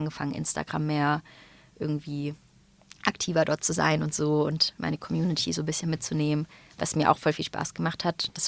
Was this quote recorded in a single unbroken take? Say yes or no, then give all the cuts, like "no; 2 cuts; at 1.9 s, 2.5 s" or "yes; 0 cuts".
yes; 0 cuts